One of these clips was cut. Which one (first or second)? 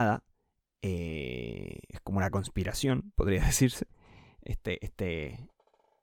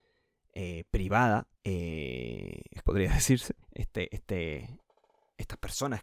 second